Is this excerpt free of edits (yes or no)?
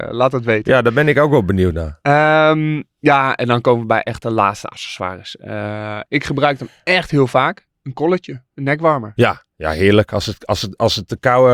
no